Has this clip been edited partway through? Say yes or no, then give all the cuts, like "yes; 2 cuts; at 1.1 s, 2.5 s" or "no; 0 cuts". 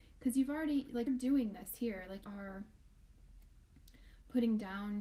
yes; 2 cuts; at 1.1 s, 2.2 s